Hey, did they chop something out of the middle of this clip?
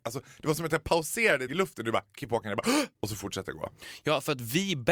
yes; 2 cuts; at 1.5 s, 2.9 s

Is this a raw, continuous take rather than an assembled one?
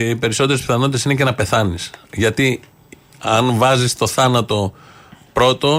yes; 0 cuts

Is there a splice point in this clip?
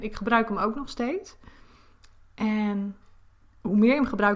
no; 0 cuts

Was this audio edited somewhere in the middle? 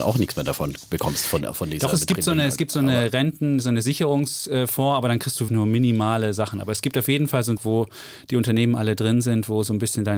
yes; 2 cuts; at 5.5 s, 7.6 s

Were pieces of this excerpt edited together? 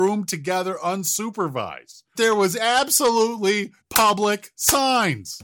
yes; 2 cuts; at 2.1 s, 3.8 s

